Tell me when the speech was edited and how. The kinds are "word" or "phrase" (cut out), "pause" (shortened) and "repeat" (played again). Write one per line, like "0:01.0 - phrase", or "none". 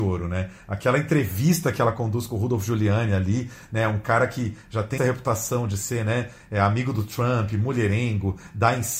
0:05.0 - word